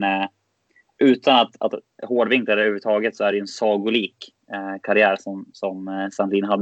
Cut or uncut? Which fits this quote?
uncut